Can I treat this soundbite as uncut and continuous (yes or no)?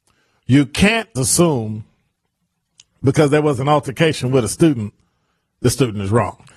no